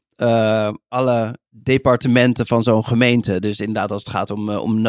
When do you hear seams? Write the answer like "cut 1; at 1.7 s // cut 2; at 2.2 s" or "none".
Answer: cut 1; at 1.5 s